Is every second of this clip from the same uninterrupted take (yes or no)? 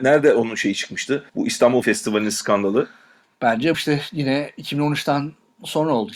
no